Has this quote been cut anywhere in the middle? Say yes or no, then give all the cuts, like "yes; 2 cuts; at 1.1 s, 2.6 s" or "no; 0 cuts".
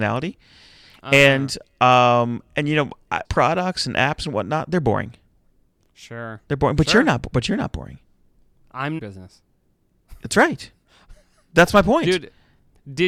yes; 2 cuts; at 3.2 s, 9.0 s